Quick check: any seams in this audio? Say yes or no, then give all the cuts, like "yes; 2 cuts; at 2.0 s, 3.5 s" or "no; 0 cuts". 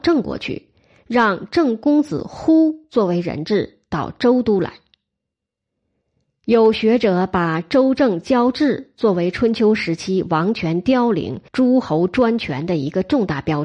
yes; 1 cut; at 11.5 s